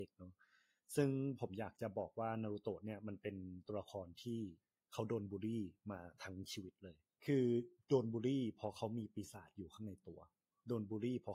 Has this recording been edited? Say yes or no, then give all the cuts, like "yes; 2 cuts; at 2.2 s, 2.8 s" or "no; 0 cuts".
yes; 1 cut; at 7.1 s